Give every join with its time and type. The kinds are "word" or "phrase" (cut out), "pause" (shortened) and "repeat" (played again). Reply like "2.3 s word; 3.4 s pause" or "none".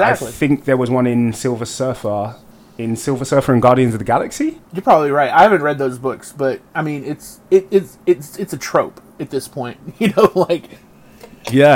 2.5 s pause; 4.7 s pause; 7.4 s pause